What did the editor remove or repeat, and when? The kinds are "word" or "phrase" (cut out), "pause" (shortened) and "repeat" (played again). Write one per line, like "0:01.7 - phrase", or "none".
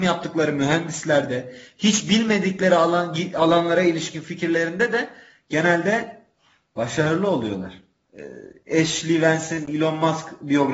none